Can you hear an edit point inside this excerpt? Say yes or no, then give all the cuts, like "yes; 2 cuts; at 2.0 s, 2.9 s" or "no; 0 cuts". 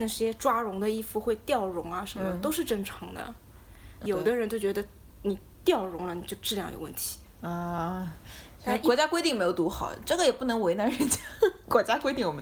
yes; 1 cut; at 4.1 s